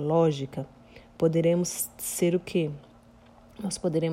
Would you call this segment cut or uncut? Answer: uncut